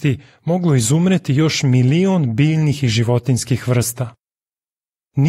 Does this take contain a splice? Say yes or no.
no